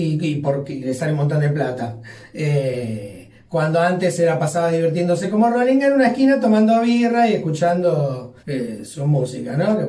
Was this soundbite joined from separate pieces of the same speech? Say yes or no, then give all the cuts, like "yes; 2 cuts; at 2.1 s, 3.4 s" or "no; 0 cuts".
yes; 1 cut; at 8.4 s